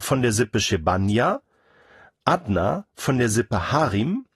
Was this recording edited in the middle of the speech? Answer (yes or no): no